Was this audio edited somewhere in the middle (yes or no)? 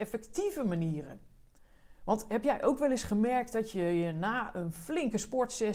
no